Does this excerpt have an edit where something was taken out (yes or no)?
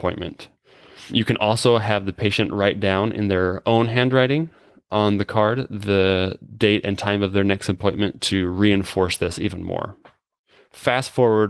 no